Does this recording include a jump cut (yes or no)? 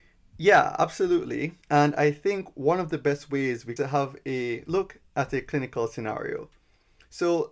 yes